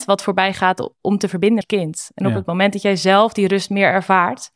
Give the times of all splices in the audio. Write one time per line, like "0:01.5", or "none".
0:01.6